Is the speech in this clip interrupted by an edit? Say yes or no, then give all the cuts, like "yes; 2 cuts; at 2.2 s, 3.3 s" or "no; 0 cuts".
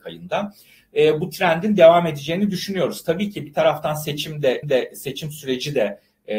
yes; 1 cut; at 4.6 s